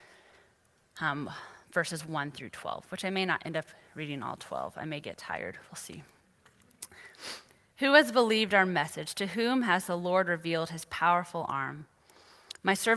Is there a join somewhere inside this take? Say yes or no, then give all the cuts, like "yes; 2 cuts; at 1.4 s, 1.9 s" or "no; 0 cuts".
no; 0 cuts